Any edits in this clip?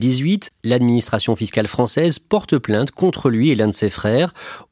no; 0 cuts

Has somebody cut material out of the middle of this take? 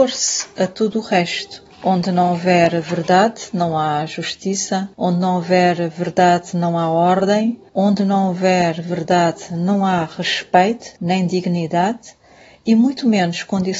yes; 4 cuts; at 1.7 s, 4.9 s, 7.7 s, 11.0 s

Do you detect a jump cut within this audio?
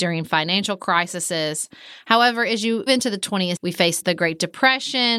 yes; 2 cuts; at 2.9 s, 3.6 s

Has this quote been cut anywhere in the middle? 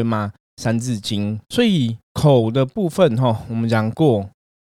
yes; 2 cuts; at 1.4 s, 2.0 s

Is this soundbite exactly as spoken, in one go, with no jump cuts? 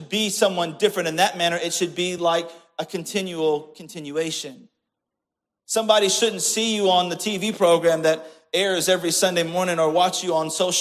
yes; 0 cuts

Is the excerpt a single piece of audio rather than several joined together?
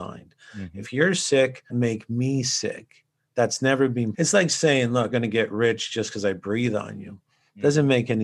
no; 3 cuts; at 1.7 s, 4.1 s, 5.1 s

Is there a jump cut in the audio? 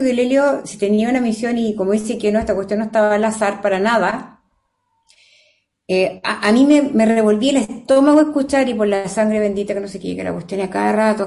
no; 0 cuts

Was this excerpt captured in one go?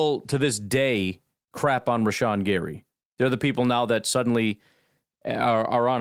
yes; 0 cuts

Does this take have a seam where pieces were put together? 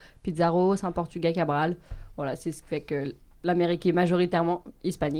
no; 0 cuts

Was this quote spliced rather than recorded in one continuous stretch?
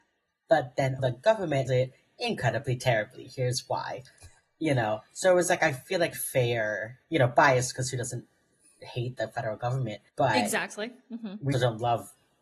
yes; 6 cuts; at 1.0 s, 1.7 s, 6.1 s, 7.0 s, 10.1 s, 11.5 s

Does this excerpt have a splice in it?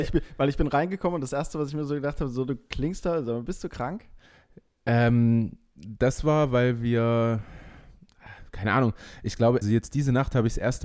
yes; 1 cut; at 9.6 s

